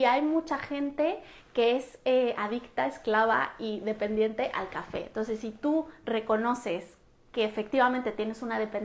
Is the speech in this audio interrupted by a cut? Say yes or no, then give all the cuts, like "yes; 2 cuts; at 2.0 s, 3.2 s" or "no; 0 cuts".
no; 0 cuts